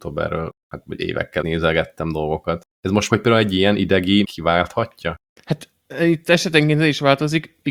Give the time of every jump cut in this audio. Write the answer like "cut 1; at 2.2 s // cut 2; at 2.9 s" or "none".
cut 1; at 1.4 s // cut 2; at 3.1 s // cut 3; at 4.2 s